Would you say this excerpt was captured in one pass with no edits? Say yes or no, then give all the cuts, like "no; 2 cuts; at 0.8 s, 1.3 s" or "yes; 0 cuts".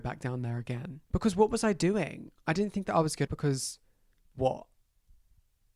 no; 1 cut; at 3.3 s